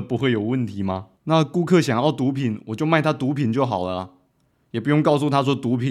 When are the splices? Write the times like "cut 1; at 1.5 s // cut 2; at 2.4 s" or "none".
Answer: cut 1; at 1.1 s